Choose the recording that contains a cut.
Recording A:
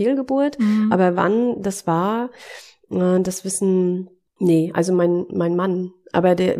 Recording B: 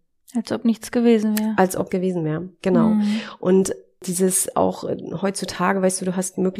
B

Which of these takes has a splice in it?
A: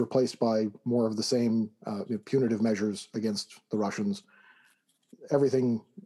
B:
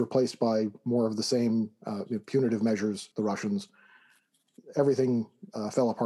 B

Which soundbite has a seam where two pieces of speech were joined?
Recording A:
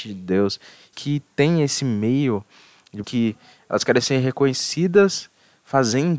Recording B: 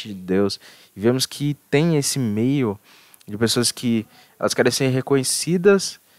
A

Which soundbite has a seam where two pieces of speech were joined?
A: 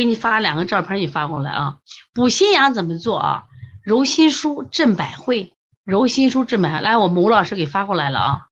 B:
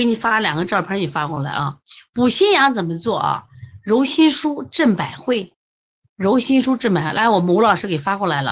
A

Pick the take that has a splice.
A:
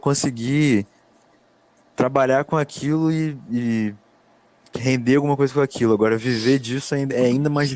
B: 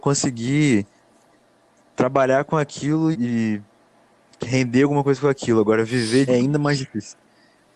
B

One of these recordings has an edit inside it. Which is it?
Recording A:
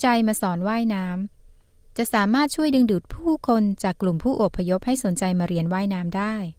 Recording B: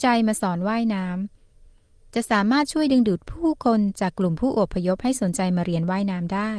A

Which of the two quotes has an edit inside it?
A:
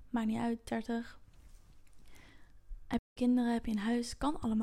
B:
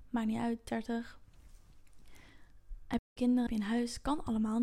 B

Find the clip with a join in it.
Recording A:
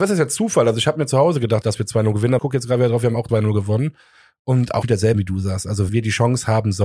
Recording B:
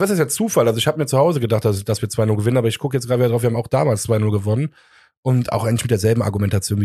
A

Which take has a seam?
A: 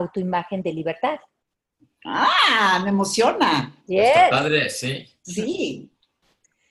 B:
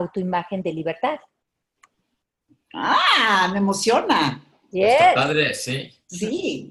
A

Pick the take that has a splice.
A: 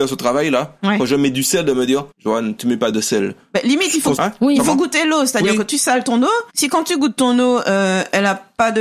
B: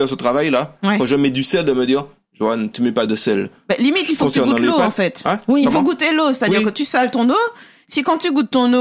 A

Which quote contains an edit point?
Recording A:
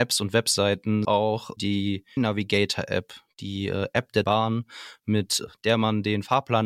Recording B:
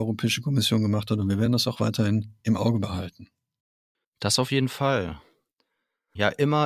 A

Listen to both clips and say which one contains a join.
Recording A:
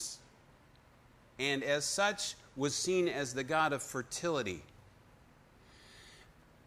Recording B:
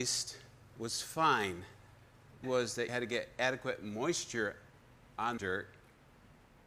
B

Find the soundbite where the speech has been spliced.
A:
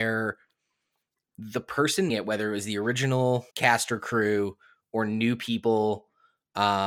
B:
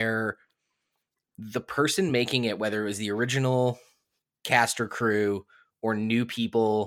A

